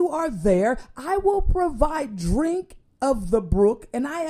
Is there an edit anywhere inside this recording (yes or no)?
no